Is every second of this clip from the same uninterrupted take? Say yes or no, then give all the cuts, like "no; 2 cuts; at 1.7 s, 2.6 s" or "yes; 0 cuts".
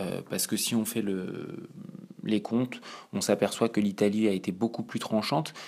yes; 0 cuts